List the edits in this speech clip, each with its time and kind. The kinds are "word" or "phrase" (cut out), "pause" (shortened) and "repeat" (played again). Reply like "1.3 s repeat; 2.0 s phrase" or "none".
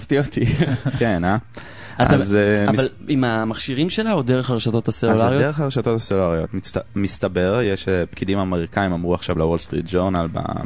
none